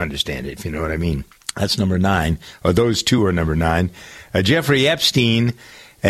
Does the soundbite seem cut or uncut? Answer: uncut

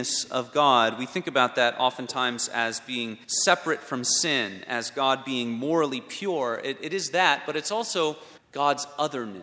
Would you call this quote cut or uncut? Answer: cut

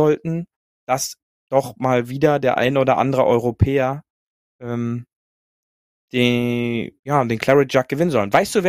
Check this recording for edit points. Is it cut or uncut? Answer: uncut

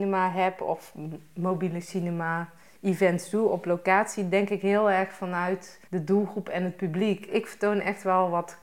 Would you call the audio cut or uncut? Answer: cut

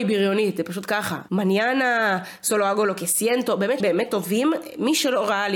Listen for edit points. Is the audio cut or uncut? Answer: cut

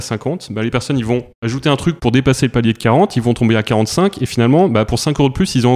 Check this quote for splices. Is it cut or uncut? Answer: uncut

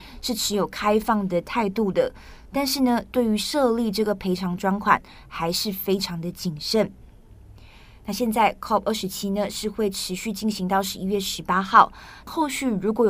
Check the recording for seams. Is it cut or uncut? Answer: uncut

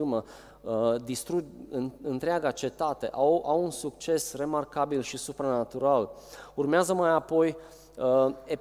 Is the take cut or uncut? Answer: uncut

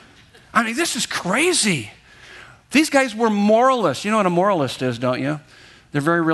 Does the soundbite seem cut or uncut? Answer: uncut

